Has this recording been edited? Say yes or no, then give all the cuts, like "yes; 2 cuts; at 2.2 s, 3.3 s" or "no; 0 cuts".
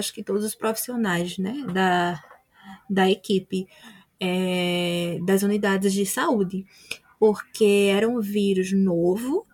no; 0 cuts